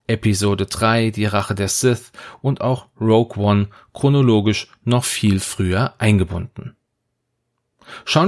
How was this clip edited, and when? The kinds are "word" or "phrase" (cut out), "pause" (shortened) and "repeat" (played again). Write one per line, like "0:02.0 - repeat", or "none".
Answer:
none